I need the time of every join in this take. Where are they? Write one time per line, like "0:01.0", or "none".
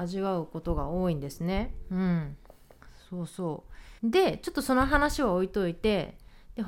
0:04.0